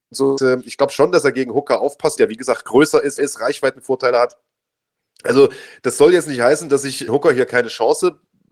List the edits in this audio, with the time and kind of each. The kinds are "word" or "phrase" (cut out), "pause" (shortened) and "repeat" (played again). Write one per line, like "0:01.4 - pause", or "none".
0:02.2 - word
0:03.2 - word
0:07.1 - word